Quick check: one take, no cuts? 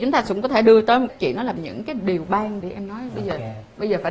no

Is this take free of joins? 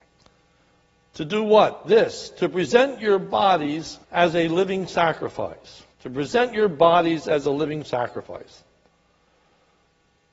no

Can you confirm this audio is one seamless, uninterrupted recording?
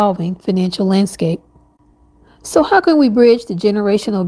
yes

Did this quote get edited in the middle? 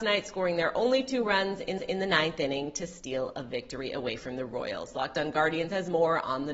yes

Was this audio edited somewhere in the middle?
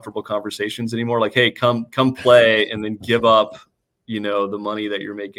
no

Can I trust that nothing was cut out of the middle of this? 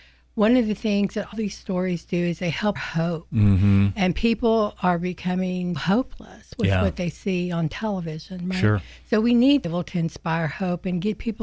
no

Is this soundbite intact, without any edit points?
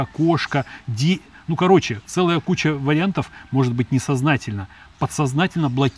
yes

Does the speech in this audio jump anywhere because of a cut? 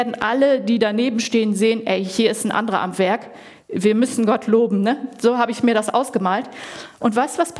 no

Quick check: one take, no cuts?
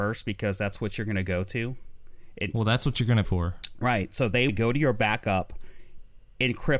no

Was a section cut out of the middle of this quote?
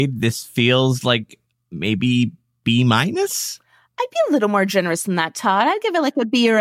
no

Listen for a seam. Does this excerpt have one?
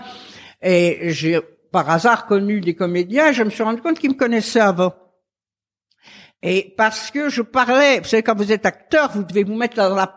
no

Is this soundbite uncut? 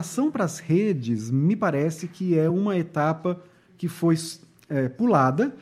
yes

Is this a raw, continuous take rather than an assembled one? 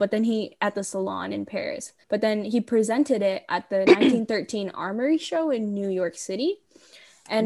no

